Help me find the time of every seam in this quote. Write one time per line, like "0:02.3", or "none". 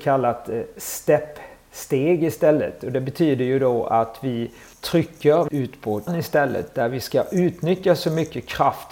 0:04.7
0:05.5
0:06.1